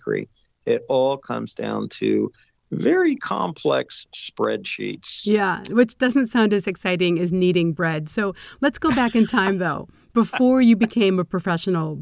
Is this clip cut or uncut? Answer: uncut